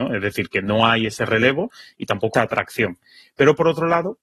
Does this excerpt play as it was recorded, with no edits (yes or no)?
no